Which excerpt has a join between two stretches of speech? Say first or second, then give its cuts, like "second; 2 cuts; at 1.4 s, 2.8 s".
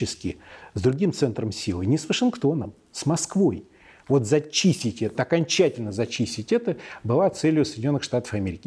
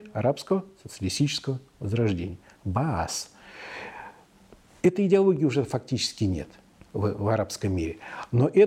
first; 1 cut; at 5.1 s